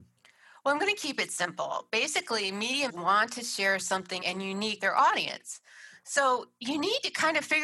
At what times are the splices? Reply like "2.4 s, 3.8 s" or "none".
2.9 s, 4.2 s, 4.8 s